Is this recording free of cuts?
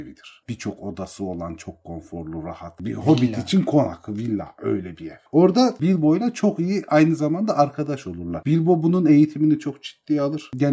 yes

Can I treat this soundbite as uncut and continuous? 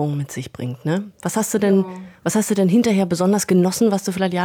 yes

